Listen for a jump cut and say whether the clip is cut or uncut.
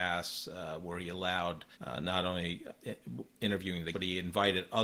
cut